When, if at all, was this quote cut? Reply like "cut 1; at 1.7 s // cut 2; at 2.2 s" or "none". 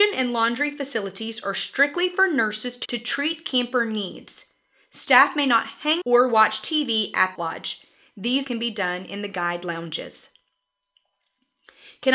cut 1; at 2.8 s // cut 2; at 6.0 s // cut 3; at 7.4 s // cut 4; at 8.4 s